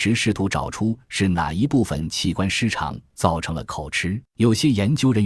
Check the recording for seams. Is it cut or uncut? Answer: cut